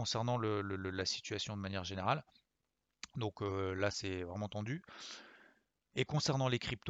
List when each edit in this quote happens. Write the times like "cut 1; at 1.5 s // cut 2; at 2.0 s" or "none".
none